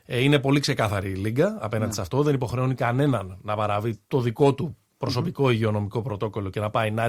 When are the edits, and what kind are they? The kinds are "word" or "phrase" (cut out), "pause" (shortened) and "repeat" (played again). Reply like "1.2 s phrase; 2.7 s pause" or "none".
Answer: 4.0 s pause; 4.9 s pause